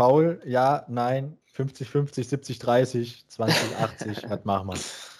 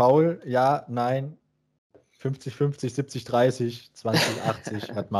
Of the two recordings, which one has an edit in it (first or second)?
first